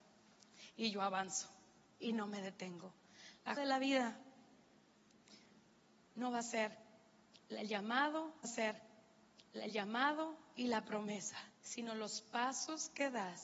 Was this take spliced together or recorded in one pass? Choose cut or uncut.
cut